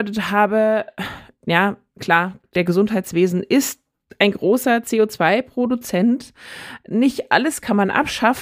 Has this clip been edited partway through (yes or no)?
no